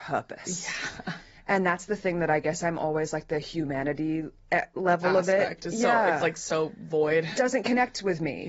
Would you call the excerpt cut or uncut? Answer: uncut